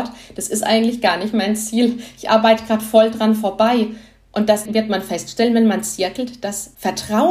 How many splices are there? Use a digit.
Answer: 0